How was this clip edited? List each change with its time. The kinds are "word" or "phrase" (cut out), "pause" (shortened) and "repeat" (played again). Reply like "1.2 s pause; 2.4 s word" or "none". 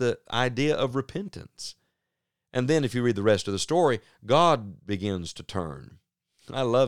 none